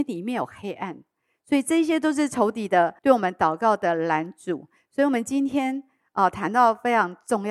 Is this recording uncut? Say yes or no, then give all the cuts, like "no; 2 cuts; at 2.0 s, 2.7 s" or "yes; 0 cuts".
no; 1 cut; at 3.0 s